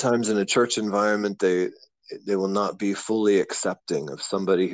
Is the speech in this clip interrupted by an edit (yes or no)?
no